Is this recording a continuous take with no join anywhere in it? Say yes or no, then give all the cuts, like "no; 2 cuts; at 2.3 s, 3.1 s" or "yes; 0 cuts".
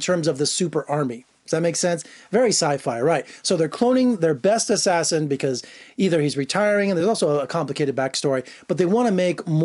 yes; 0 cuts